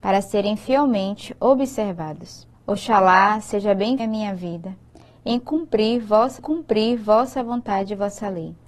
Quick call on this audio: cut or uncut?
cut